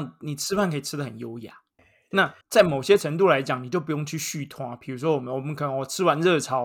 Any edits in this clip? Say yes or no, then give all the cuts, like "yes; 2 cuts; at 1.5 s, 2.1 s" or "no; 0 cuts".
yes; 2 cuts; at 1.8 s, 2.4 s